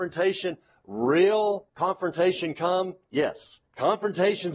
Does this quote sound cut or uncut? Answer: cut